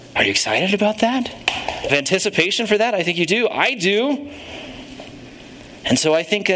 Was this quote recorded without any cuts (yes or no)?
no